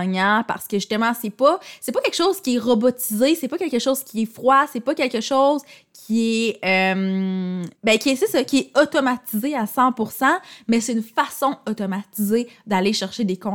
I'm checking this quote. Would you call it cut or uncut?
cut